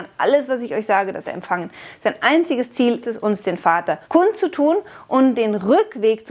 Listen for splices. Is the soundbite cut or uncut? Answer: cut